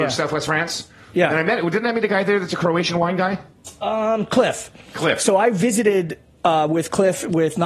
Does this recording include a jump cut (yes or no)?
no